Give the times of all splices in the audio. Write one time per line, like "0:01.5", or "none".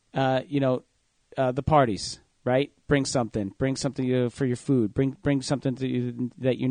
none